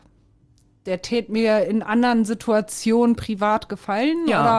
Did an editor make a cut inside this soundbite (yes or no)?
no